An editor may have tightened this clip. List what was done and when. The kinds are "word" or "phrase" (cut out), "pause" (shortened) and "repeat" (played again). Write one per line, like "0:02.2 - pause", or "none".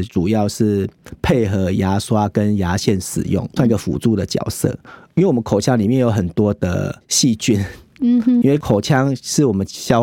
0:03.6 - word
0:08.4 - word